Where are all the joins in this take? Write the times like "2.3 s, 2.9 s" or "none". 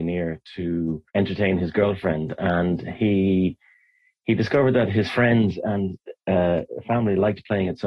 1.1 s